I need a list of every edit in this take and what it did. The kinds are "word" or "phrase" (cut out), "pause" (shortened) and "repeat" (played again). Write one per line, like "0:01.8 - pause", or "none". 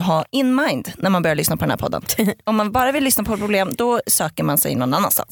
none